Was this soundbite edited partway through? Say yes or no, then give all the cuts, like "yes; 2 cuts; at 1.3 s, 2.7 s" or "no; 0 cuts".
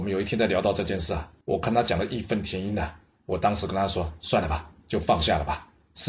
yes; 1 cut; at 1.4 s